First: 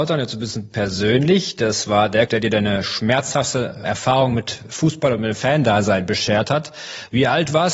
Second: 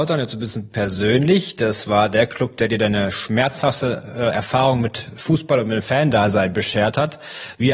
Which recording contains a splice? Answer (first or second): first